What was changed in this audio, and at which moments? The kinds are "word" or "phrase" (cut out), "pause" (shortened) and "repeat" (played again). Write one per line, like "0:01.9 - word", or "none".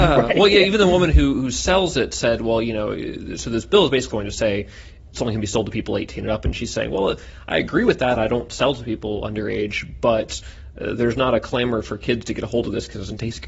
0:04.1 - word